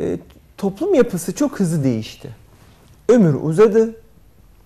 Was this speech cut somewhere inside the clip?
no; 0 cuts

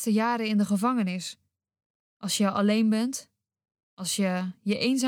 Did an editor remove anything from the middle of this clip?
no; 0 cuts

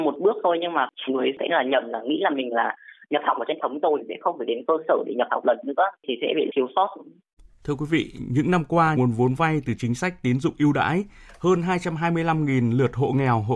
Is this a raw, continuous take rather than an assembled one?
no; 5 cuts; at 1.1 s, 3.6 s, 6.5 s, 7.4 s, 8.9 s

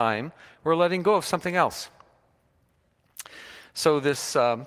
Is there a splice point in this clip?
no; 0 cuts

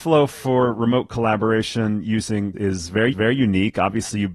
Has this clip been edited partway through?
yes; 2 cuts; at 2.5 s, 3.1 s

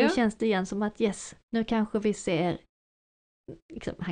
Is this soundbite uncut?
no; 1 cut; at 1.4 s

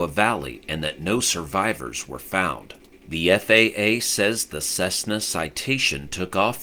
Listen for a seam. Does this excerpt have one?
no; 0 cuts

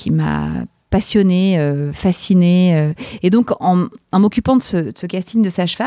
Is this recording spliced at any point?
no; 0 cuts

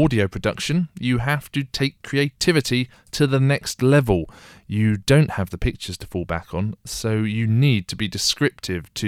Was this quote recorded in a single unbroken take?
yes; 0 cuts

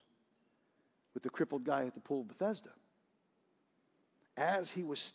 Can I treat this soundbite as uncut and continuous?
yes; 0 cuts

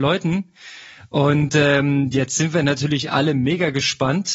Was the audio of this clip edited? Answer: no; 0 cuts

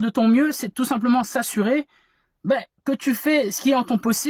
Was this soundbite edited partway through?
no; 0 cuts

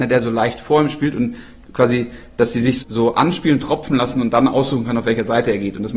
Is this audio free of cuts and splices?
no; 1 cut; at 2.8 s

